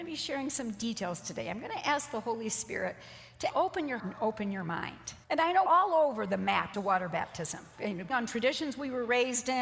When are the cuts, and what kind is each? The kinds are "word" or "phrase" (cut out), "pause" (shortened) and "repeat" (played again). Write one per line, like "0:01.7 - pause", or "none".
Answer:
0:03.5 - word
0:04.0 - word
0:05.2 - pause
0:05.7 - word
0:06.7 - phrase
0:08.1 - word